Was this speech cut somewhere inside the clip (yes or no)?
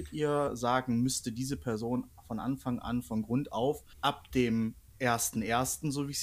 yes